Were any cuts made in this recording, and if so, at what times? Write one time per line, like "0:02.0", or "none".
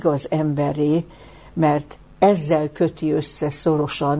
none